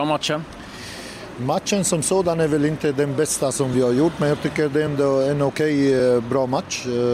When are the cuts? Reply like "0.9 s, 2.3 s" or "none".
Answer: none